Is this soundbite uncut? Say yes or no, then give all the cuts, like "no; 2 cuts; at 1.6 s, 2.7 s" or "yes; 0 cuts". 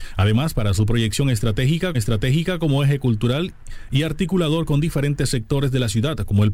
no; 1 cut; at 1.9 s